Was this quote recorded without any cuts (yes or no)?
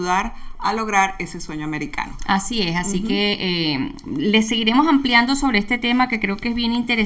yes